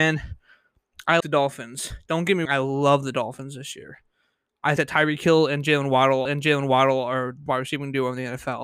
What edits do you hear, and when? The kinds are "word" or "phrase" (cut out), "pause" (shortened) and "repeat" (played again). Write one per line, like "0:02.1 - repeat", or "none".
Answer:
0:01.2 - word
0:02.5 - word
0:04.8 - word
0:06.3 - repeat
0:07.5 - word